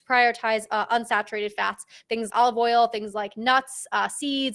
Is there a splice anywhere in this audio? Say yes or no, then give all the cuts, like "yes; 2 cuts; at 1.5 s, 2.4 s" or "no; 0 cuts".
yes; 1 cut; at 2.3 s